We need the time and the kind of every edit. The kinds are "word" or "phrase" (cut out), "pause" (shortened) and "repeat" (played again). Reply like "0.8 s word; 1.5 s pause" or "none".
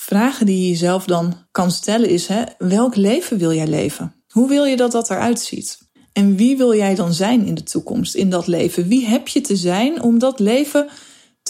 1.5 s pause; 4.2 s pause; 5.9 s pause